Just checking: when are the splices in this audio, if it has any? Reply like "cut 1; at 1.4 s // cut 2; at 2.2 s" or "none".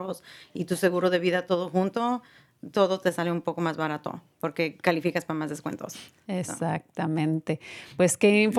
none